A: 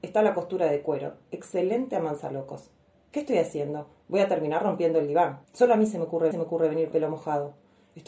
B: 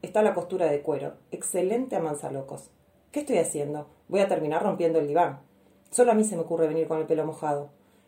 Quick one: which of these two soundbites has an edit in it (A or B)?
A